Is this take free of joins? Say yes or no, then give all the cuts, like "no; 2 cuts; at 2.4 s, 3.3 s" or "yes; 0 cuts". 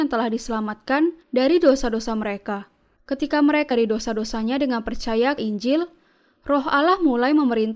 no; 4 cuts; at 1.2 s, 3.0 s, 3.7 s, 5.4 s